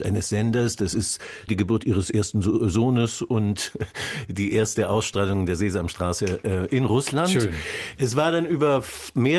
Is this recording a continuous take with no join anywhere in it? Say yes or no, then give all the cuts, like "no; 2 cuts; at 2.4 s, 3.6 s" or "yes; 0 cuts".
no; 1 cut; at 1.5 s